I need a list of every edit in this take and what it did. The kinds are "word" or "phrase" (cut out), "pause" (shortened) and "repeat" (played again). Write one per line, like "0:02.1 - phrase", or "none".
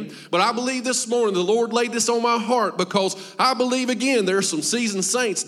none

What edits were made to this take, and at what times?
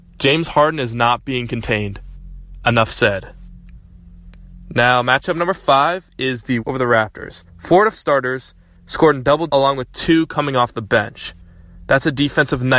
0:06.6 - word
0:07.5 - pause
0:07.9 - word
0:09.5 - word

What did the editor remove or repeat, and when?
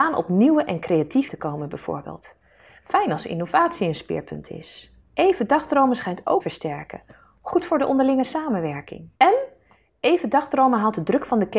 0:01.3 - word
0:05.0 - pause
0:06.4 - phrase
0:09.2 - pause

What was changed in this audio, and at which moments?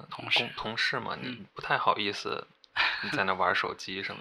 none

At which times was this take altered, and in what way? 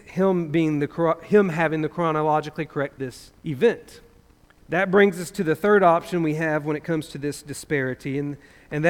0:03.0 - phrase
0:03.4 - pause

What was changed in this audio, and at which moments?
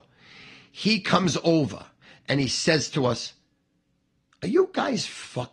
0:02.0 - pause

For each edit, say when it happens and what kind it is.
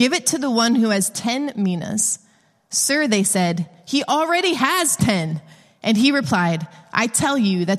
none

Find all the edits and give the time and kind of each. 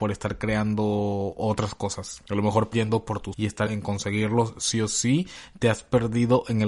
0:02.7 - word
0:03.3 - word
0:03.7 - word

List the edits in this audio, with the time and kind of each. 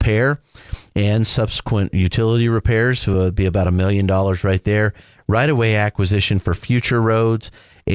none

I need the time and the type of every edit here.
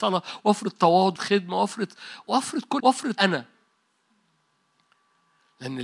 0:01.2 - word
0:02.2 - word
0:02.8 - word
0:03.2 - word

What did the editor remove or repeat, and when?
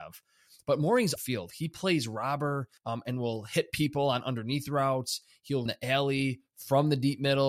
0:01.2 - phrase
0:02.8 - pause
0:05.7 - word

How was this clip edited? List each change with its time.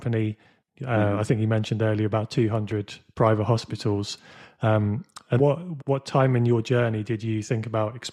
0:05.4 - word
0:05.8 - word

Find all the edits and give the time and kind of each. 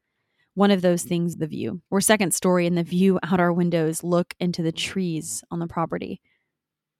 0:01.3 - word
0:01.9 - pause

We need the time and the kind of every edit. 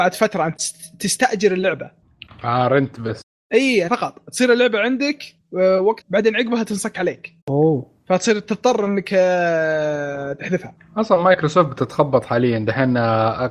0:03.9 - phrase
0:06.0 - word
0:07.4 - pause

